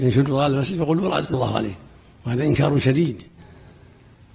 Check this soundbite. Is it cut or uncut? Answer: cut